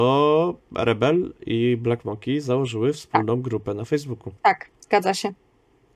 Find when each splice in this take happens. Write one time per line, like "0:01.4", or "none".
0:04.4